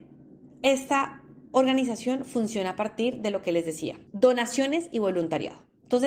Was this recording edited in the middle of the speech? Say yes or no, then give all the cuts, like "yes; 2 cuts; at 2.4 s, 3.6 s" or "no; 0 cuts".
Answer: yes; 1 cut; at 4.1 s